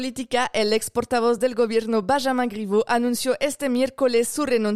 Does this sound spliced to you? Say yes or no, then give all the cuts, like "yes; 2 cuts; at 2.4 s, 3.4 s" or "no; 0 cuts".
no; 0 cuts